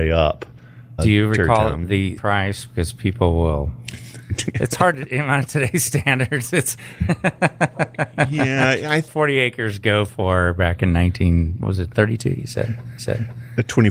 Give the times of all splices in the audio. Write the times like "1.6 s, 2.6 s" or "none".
1.0 s, 2.2 s, 6.8 s, 9.1 s, 13.0 s